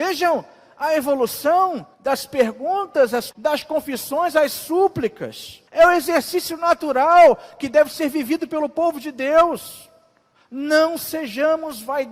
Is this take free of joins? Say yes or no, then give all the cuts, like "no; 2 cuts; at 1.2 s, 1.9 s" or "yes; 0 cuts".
no; 4 cuts; at 1.9 s, 3.3 s, 5.7 s, 10.3 s